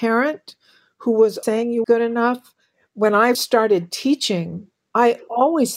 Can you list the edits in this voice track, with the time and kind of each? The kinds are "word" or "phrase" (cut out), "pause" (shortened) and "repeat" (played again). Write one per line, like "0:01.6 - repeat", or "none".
0:01.4 - word
0:01.8 - word
0:03.3 - word